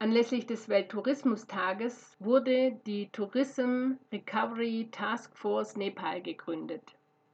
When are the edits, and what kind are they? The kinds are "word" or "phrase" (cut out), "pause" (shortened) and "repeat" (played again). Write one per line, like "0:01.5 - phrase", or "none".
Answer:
none